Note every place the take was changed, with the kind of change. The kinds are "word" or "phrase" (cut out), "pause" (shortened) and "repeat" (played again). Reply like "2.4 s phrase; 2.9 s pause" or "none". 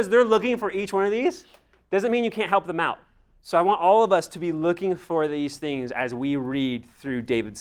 none